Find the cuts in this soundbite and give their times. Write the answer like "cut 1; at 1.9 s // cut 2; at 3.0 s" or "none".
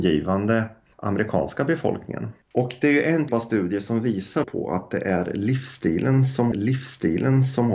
cut 1; at 2.4 s // cut 2; at 3.3 s // cut 3; at 4.4 s // cut 4; at 6.5 s